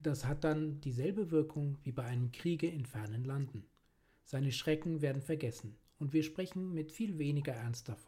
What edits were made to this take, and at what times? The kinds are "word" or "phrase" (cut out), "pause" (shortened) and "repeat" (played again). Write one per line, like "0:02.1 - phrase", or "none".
none